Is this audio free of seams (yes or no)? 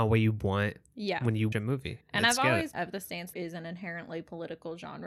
no